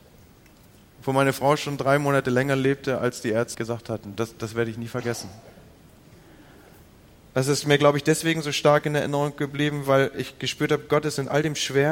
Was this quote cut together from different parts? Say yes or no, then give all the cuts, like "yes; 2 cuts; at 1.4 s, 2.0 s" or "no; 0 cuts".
yes; 1 cut; at 3.5 s